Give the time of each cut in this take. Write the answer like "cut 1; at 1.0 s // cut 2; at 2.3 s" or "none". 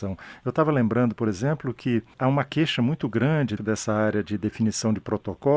cut 1; at 3.6 s

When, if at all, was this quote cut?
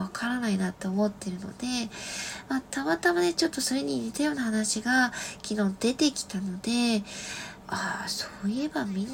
cut 1; at 7.6 s

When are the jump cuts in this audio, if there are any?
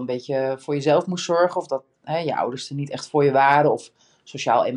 none

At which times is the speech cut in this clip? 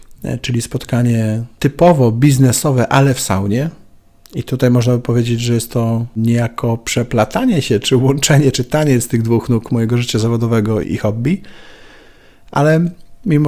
cut 1; at 10.8 s

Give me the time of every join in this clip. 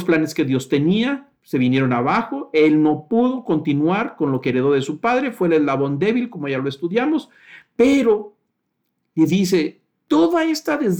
cut 1; at 1.4 s

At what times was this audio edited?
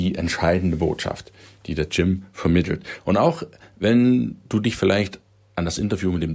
none

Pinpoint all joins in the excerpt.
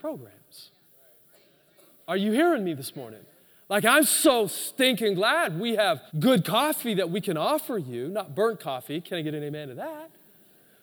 cut 1; at 3.3 s // cut 2; at 6.1 s

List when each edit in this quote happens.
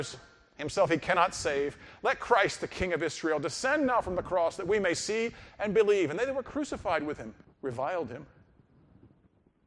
cut 1; at 7.4 s

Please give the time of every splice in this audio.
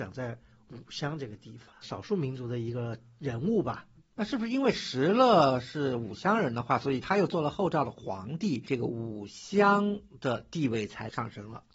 cut 1; at 1.8 s

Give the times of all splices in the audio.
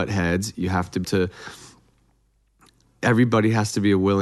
cut 1; at 1.0 s

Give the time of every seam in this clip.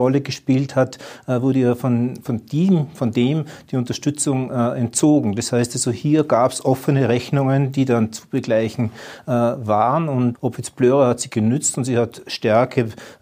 cut 1; at 10.3 s

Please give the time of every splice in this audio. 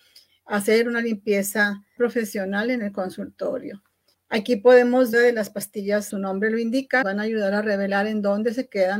cut 1; at 2.0 s // cut 2; at 4.1 s // cut 3; at 5.1 s // cut 4; at 6.1 s // cut 5; at 7.0 s

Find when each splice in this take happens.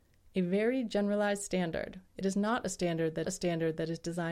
cut 1; at 3.2 s

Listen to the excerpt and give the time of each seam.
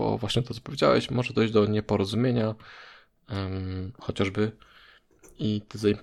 none

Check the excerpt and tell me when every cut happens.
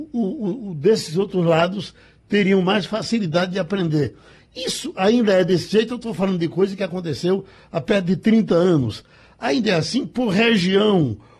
none

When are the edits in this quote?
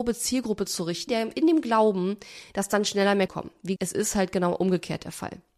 cut 1; at 1.1 s // cut 2; at 3.3 s // cut 3; at 3.8 s

